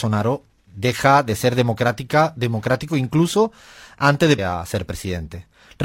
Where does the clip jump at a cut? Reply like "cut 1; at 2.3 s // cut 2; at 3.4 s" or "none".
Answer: cut 1; at 4.4 s